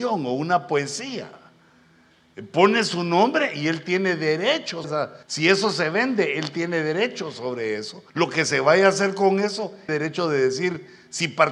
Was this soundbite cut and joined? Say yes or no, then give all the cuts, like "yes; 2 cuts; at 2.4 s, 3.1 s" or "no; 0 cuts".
yes; 4 cuts; at 4.8 s, 5.2 s, 8.1 s, 9.9 s